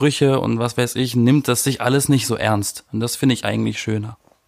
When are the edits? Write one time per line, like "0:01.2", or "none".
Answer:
none